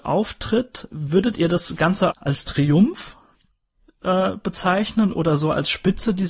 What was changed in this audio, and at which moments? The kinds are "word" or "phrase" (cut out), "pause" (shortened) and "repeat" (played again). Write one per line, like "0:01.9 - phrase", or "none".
0:02.1 - word